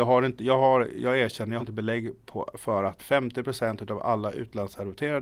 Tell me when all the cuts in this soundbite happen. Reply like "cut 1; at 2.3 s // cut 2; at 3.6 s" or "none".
cut 1; at 1.6 s // cut 2; at 3.0 s